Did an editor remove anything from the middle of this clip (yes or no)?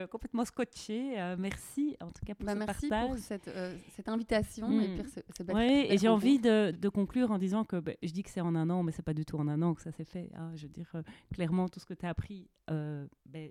yes